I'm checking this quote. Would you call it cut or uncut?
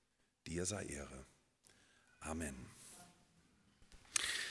uncut